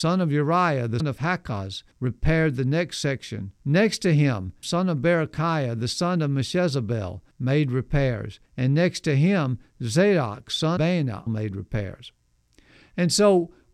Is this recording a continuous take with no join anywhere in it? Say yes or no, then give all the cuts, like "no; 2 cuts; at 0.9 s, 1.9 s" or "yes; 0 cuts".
no; 8 cuts; at 1.0 s, 1.9 s, 3.6 s, 4.6 s, 7.3 s, 8.5 s, 10.8 s, 11.3 s